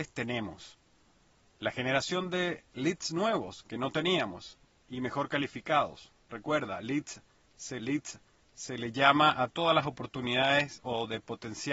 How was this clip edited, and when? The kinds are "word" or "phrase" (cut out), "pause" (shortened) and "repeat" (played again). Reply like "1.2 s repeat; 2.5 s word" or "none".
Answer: 7.8 s repeat